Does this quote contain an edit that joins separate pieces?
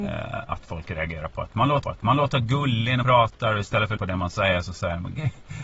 yes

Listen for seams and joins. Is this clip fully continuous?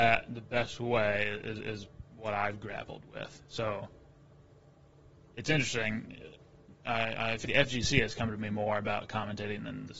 no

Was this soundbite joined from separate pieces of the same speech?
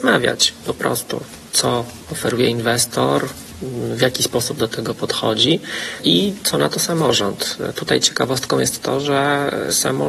no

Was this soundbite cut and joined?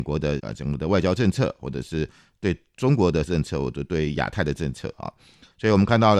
no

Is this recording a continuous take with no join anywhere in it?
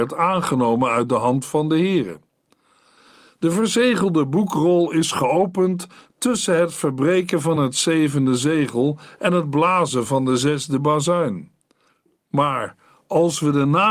yes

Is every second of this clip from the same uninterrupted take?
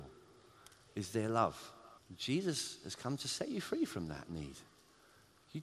no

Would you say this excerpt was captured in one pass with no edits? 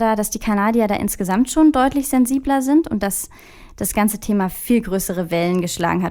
yes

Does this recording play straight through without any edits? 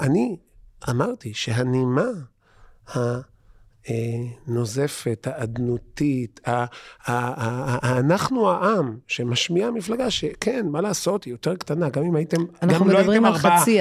yes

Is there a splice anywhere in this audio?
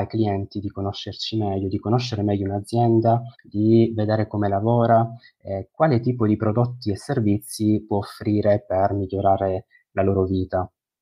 yes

